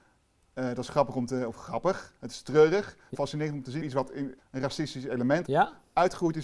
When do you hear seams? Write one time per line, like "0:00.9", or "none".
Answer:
0:02.2
0:03.1
0:03.8
0:04.4
0:05.4